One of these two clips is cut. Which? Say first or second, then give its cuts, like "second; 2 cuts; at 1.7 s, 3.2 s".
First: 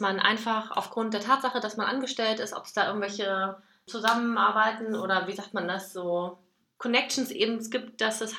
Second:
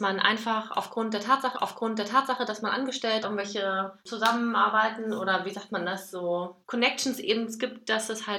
second; 4 cuts; at 1.5 s, 3.2 s, 4.0 s, 6.6 s